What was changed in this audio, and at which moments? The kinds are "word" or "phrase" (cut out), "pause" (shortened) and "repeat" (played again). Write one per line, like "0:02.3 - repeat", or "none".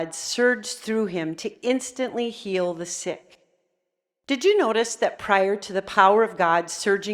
none